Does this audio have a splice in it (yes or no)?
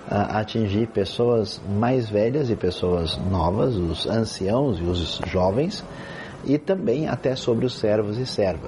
no